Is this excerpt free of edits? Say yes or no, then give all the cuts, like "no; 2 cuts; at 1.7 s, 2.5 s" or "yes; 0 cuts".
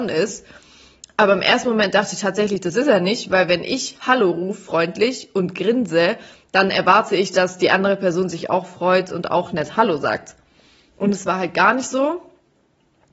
yes; 0 cuts